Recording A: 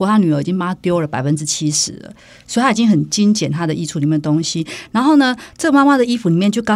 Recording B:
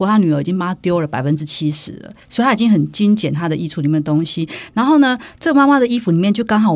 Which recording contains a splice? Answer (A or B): B